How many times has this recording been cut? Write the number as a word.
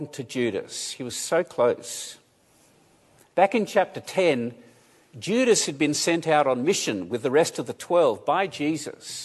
zero